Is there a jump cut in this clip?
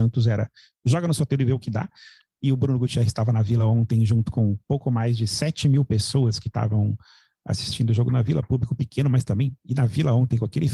no; 0 cuts

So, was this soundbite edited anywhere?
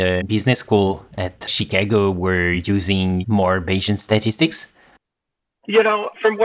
no; 0 cuts

